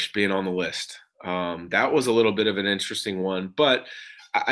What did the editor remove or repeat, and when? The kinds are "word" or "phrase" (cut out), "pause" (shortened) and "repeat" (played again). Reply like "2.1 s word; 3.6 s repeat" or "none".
none

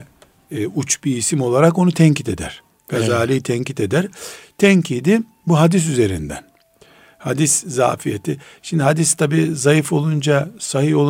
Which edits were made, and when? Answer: none

